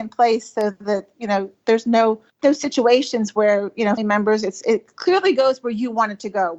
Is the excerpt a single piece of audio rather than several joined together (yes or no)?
no